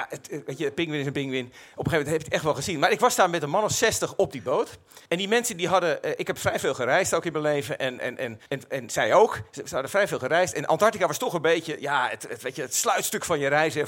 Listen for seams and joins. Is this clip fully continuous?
no; 2 cuts; at 5.1 s, 8.5 s

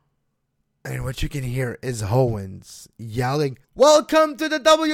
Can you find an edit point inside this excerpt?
yes; 1 cut; at 3.6 s

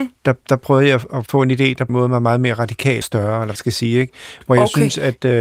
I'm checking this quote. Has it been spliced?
yes; 4 cuts; at 1.3 s, 1.9 s, 3.0 s, 3.6 s

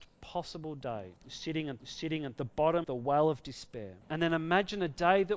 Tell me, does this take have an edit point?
yes; 4 cuts; at 1.2 s, 1.8 s, 2.8 s, 4.0 s

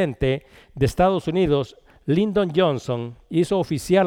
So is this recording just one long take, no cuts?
yes; 0 cuts

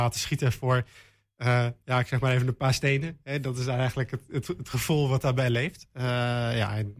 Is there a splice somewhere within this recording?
yes; 1 cut; at 5.9 s

